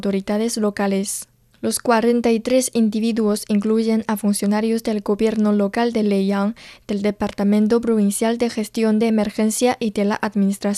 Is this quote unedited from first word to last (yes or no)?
yes